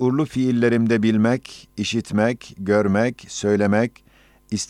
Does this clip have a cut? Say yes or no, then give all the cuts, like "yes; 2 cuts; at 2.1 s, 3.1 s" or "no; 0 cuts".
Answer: no; 0 cuts